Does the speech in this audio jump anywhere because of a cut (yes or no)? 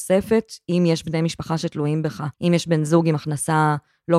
yes